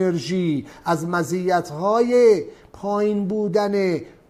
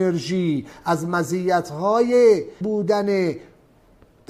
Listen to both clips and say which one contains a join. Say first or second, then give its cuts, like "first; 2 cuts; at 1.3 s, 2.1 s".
second; 1 cut; at 2.6 s